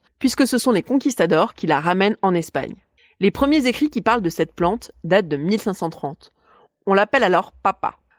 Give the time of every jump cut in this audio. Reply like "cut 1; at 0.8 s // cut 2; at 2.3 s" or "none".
none